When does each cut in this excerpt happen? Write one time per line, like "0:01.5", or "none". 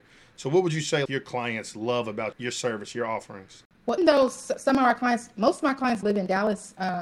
0:01.1
0:02.3
0:04.0
0:06.0